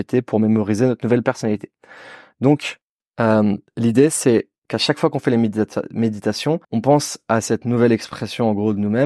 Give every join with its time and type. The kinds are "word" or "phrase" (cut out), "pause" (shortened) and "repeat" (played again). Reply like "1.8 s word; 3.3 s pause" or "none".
2.8 s pause; 6.6 s pause